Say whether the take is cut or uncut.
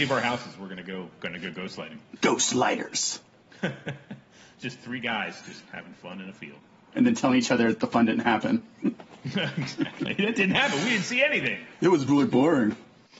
uncut